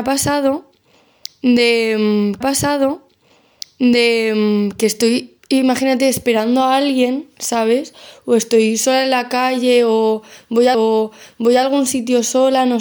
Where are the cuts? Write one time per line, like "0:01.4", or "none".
0:02.4
0:05.4
0:10.7